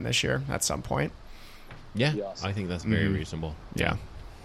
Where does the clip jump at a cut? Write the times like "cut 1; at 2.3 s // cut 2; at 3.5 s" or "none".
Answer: none